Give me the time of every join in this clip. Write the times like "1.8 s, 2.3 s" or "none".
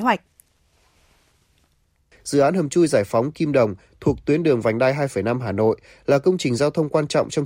none